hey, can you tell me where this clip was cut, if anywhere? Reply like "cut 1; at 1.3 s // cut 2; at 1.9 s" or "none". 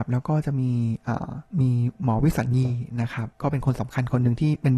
cut 1; at 1.5 s // cut 2; at 3.3 s